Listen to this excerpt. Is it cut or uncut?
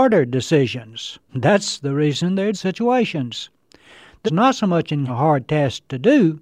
cut